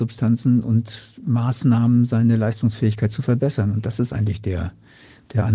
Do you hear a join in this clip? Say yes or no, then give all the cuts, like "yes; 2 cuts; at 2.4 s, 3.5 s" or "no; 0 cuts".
no; 0 cuts